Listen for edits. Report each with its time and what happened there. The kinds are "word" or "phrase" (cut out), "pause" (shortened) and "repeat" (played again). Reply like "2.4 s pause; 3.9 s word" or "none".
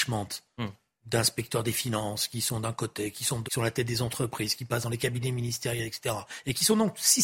3.4 s word

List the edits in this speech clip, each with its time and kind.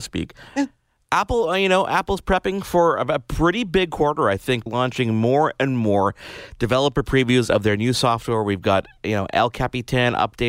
4.7 s phrase

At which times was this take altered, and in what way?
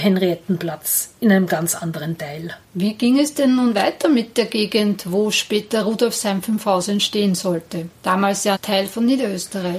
8.6 s word

